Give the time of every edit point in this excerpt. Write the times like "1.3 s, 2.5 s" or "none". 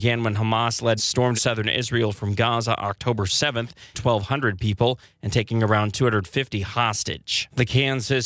1.0 s, 1.3 s, 3.9 s